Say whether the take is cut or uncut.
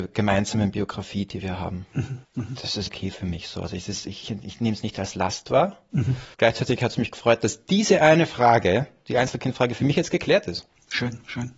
cut